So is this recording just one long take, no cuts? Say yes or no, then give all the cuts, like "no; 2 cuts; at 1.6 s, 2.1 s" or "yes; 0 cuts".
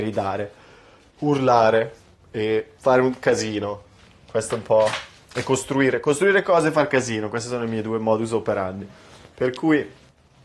no; 1 cut; at 2.8 s